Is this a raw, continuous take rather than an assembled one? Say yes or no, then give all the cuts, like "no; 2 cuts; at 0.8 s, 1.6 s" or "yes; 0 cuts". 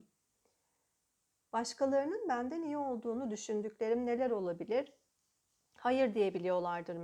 yes; 0 cuts